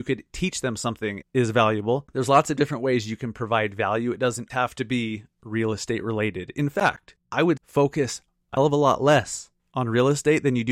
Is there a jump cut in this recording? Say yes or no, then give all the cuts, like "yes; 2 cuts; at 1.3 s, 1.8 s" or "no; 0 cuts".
yes; 4 cuts; at 1.2 s, 4.5 s, 7.6 s, 8.6 s